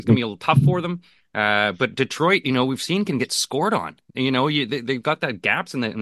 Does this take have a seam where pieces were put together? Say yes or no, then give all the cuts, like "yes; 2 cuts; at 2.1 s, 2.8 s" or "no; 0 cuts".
no; 0 cuts